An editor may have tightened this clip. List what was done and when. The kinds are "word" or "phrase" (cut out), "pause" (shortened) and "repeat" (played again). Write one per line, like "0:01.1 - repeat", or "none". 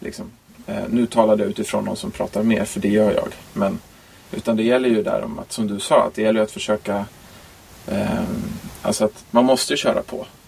none